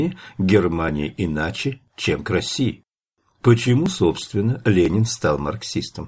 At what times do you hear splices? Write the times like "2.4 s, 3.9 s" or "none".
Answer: none